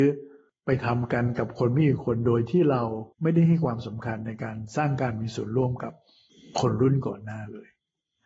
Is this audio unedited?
no; 1 cut; at 3.1 s

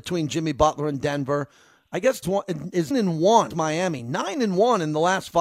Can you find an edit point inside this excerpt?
yes; 3 cuts; at 2.2 s, 2.9 s, 3.5 s

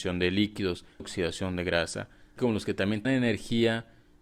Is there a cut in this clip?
yes; 3 cuts; at 1.0 s, 2.4 s, 3.0 s

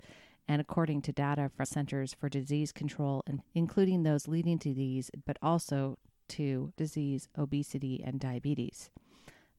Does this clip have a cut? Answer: yes; 4 cuts; at 1.6 s, 3.4 s, 5.2 s, 6.8 s

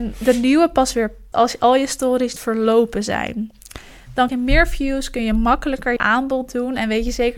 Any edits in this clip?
yes; 4 cuts; at 1.3 s, 2.4 s, 4.3 s, 6.0 s

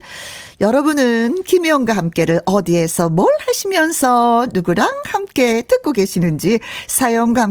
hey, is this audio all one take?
yes; 0 cuts

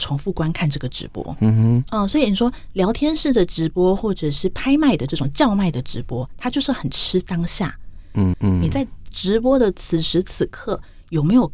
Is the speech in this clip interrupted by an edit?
yes; 1 cut; at 8.3 s

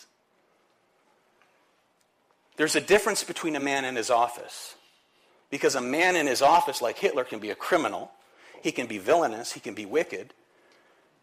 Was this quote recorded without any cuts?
yes; 0 cuts

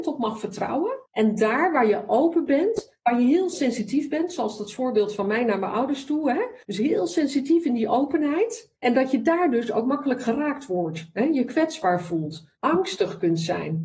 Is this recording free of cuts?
no; 4 cuts; at 1.1 s, 6.6 s, 8.8 s, 12.6 s

